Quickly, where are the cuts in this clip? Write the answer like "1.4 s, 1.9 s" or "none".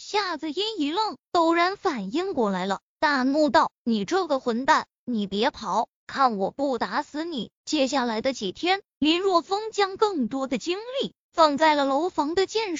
7.6 s